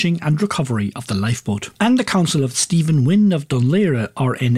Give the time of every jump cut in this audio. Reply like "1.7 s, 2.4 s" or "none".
1.7 s, 2.5 s